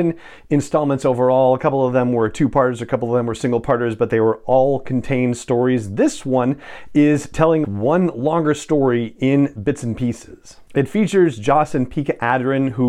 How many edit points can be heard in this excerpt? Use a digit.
1